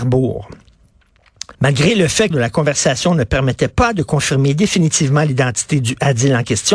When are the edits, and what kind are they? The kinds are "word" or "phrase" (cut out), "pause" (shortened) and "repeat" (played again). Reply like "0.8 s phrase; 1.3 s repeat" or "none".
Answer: 1.5 s pause; 2.3 s phrase